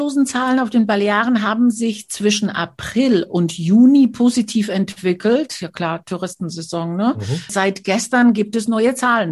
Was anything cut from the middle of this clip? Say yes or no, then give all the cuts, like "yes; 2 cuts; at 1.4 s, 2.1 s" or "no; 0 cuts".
no; 0 cuts